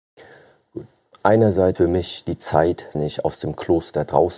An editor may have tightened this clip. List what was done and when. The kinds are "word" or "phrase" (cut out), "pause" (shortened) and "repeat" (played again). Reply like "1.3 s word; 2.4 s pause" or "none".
1.8 s word; 2.9 s word